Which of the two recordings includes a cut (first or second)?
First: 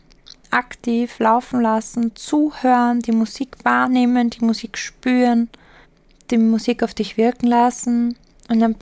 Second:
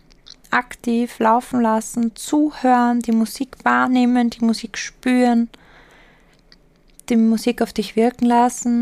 first